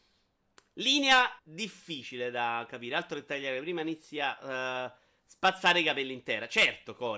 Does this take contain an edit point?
yes; 1 cut; at 1.4 s

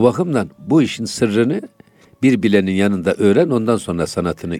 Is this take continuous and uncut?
yes; 0 cuts

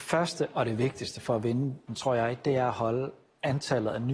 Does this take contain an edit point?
yes; 1 cut; at 1.9 s

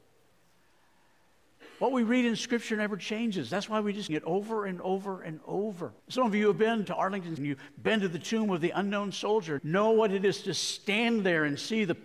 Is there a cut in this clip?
yes; 5 cuts; at 4.1 s, 6.0 s, 6.8 s, 7.4 s, 9.6 s

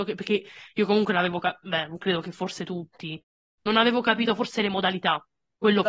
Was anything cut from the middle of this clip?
no; 0 cuts

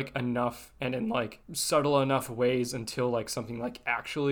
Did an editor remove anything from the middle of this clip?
yes; 1 cut; at 1.4 s

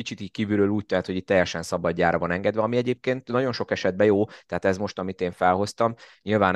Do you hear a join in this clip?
no; 0 cuts

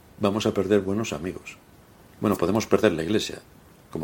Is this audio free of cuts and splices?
yes; 0 cuts

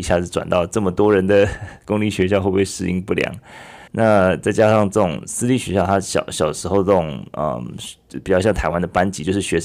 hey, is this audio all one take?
no; 1 cut; at 3.9 s

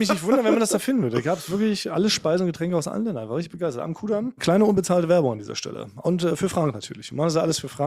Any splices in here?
no; 0 cuts

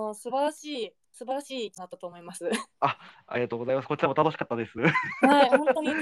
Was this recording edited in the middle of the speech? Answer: yes; 2 cuts; at 1.0 s, 2.7 s

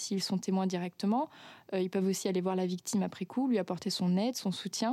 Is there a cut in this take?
no; 0 cuts

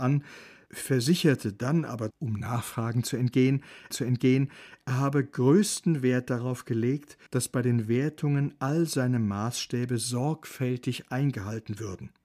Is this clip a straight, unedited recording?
no; 3 cuts; at 2.1 s, 3.9 s, 7.3 s

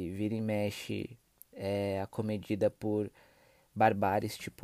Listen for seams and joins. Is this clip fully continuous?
yes; 0 cuts

